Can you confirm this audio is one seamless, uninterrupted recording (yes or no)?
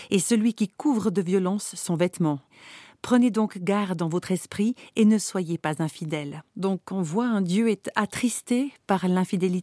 no